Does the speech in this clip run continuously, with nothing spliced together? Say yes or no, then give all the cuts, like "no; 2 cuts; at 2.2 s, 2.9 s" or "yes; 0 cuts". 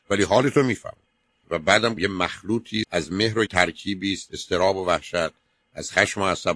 no; 5 cuts; at 1.4 s, 2.0 s, 2.8 s, 3.5 s, 4.3 s